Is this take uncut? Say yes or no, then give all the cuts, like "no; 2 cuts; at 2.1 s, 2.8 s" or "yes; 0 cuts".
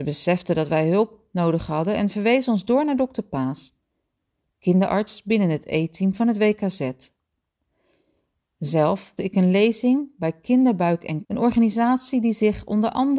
no; 2 cuts; at 9.2 s, 11.2 s